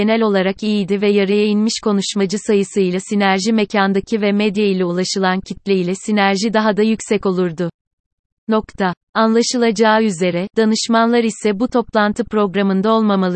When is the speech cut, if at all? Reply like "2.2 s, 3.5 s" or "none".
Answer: none

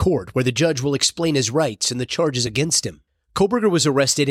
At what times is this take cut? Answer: none

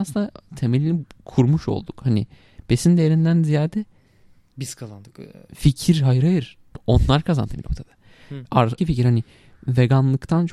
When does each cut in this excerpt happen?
8.5 s, 8.8 s

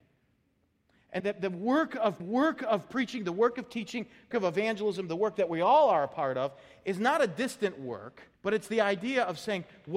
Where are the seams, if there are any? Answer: 1.2 s, 2.2 s, 4.3 s, 8.3 s

